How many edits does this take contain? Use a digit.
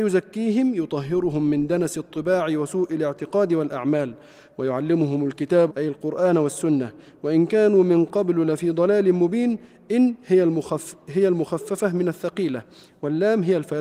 1